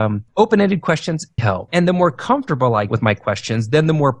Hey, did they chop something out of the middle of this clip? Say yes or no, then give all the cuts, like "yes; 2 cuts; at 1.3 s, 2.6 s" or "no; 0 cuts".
yes; 2 cuts; at 1.4 s, 2.9 s